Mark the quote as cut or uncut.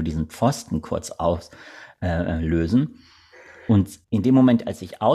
cut